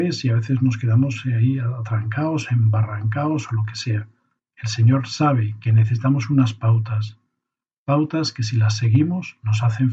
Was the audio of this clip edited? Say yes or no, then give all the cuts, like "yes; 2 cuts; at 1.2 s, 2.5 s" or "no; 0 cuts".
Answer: no; 0 cuts